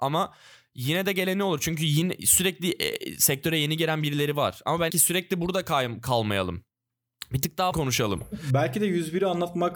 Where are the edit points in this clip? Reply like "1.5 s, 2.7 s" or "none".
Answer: 4.9 s, 7.7 s